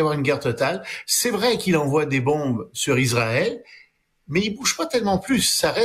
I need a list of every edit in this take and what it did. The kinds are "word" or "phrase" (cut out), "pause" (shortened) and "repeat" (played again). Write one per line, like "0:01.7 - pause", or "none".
none